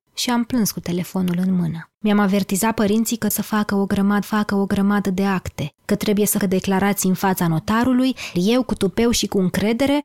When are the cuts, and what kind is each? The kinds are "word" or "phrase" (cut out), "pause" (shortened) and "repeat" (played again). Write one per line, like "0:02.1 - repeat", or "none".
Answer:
0:01.9 - pause
0:03.3 - word
0:04.2 - repeat
0:06.4 - word
0:08.4 - word